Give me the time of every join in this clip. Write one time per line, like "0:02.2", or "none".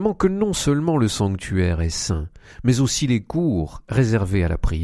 none